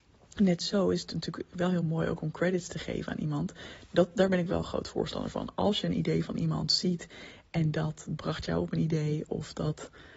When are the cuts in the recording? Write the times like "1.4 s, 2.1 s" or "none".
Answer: none